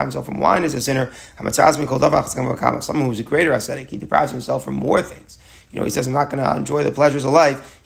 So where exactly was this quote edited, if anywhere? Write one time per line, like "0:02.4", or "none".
none

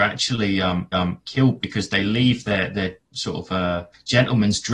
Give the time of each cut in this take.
0:00.9

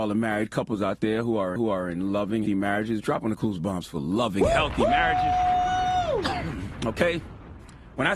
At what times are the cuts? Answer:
0:01.6
0:02.5

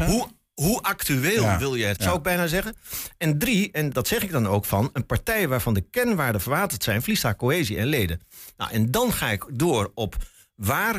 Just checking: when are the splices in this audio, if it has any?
0:02.0
0:03.9

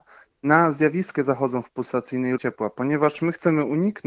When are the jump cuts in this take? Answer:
0:01.2
0:02.4

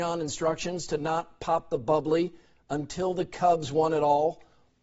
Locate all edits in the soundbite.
none

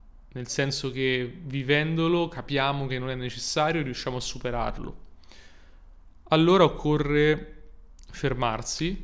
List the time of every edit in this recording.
none

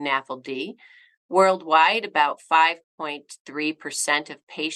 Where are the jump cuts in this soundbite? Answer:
none

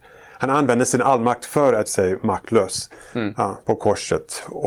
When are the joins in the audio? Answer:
0:01.9

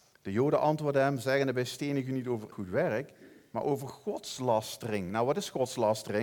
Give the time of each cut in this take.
0:02.5

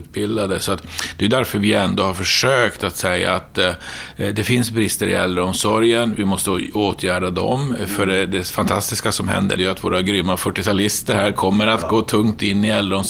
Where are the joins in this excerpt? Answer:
0:09.6

